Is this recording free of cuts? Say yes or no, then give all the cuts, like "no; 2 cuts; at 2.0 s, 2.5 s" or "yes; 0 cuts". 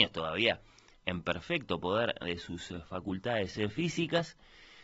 yes; 0 cuts